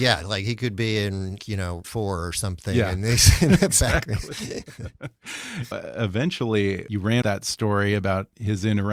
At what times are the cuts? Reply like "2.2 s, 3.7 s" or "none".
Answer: 1.4 s, 1.8 s, 5.7 s, 7.2 s